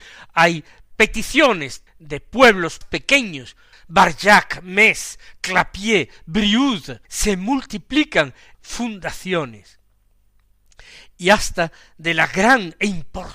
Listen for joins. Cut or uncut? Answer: cut